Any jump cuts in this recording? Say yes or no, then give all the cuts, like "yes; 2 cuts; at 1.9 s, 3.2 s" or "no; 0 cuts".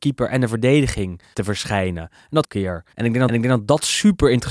yes; 4 cuts; at 1.3 s, 2.4 s, 2.9 s, 3.3 s